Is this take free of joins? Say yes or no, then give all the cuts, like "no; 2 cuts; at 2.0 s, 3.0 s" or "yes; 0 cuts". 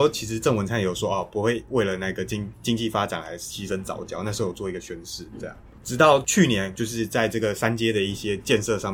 yes; 0 cuts